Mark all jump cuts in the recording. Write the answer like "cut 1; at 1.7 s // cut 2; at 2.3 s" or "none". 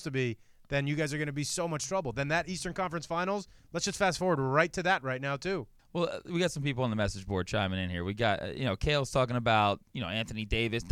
cut 1; at 5.8 s

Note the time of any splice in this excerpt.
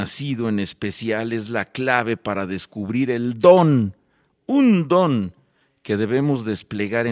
none

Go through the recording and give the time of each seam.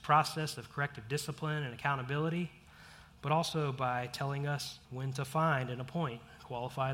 cut 1; at 4.8 s

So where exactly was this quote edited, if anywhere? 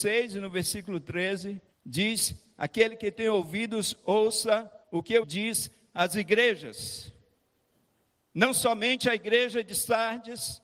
cut 1; at 1.7 s // cut 2; at 4.8 s // cut 3; at 5.2 s // cut 4; at 7.7 s

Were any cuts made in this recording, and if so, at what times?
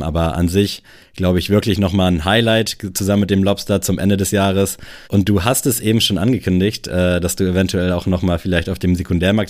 cut 1; at 5.0 s

